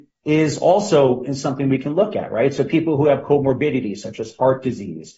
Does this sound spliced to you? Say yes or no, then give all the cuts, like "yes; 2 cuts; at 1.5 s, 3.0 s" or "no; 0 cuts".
no; 0 cuts